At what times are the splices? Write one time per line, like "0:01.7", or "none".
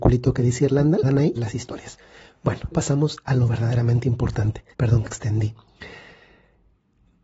0:01.0
0:01.4
0:02.7
0:04.7
0:05.1